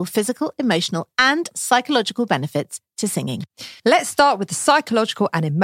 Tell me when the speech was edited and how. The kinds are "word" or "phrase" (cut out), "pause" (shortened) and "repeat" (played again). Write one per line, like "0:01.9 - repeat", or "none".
0:03.8 - pause